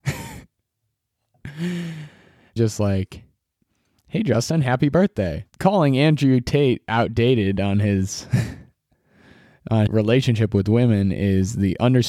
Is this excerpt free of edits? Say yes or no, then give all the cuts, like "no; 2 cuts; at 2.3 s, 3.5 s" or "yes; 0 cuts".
no; 3 cuts; at 2.6 s, 5.5 s, 9.9 s